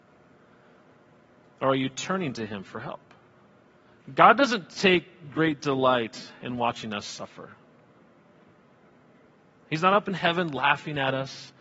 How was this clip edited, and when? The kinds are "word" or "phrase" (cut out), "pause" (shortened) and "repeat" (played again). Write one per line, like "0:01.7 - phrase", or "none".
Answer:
0:03.8 - pause